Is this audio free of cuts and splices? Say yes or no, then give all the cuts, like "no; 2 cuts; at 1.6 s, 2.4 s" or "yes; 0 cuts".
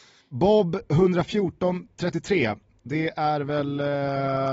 yes; 0 cuts